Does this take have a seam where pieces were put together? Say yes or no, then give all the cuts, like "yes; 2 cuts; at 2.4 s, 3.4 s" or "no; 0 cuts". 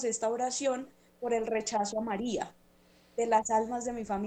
no; 0 cuts